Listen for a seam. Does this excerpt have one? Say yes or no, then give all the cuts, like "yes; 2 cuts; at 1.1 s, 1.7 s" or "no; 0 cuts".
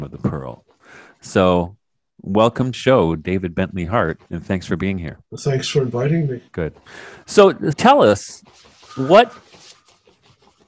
yes; 5 cuts; at 2.7 s, 4.3 s, 5.2 s, 6.5 s, 7.7 s